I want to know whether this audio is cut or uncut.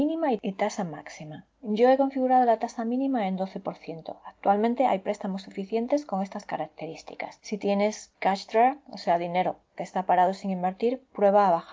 uncut